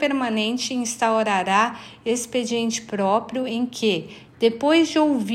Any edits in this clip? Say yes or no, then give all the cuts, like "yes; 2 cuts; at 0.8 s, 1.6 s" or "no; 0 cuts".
no; 0 cuts